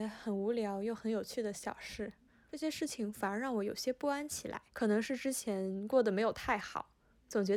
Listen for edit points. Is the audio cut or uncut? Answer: cut